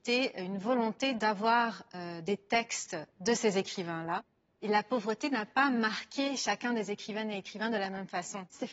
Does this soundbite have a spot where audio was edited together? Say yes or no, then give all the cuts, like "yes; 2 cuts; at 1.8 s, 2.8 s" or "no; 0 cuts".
no; 0 cuts